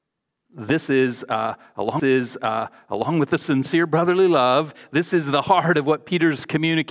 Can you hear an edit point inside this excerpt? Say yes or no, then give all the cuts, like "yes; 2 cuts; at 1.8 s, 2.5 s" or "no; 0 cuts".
yes; 1 cut; at 2.0 s